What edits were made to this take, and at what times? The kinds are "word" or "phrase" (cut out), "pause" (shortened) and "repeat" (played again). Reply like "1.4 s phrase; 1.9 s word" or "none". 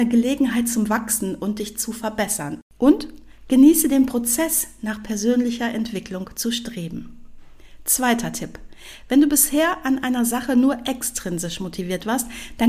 none